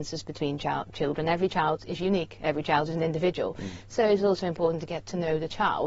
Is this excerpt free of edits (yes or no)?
yes